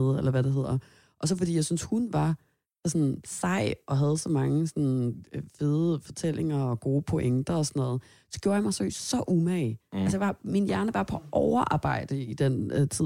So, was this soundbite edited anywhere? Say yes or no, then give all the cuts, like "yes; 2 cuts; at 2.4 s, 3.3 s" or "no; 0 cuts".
no; 0 cuts